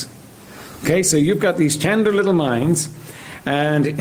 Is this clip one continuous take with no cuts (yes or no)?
yes